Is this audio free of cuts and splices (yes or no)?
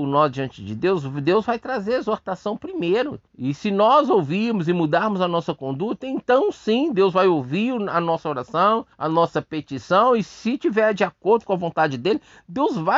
no